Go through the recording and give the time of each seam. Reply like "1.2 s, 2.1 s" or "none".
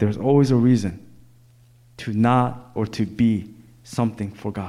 2.8 s